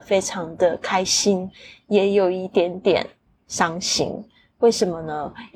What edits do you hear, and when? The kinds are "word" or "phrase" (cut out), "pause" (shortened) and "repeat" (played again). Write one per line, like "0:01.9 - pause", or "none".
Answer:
none